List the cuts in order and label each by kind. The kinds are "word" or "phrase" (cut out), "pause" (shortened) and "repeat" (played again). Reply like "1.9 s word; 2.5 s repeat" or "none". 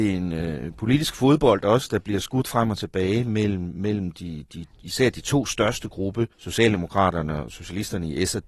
6.3 s pause